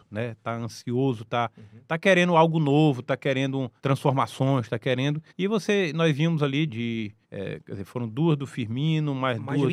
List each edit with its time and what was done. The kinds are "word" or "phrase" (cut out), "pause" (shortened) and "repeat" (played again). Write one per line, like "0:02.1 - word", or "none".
0:03.8 - pause
0:05.3 - pause
0:06.7 - word
0:07.2 - pause